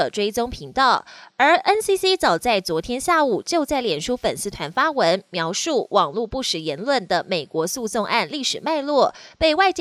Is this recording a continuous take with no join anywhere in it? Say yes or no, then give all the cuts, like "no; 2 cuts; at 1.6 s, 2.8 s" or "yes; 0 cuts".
yes; 0 cuts